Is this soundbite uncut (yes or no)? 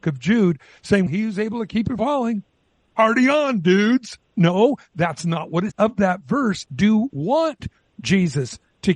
no